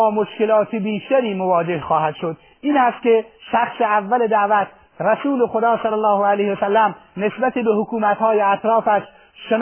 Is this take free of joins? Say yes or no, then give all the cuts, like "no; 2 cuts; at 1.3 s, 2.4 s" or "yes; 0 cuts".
yes; 0 cuts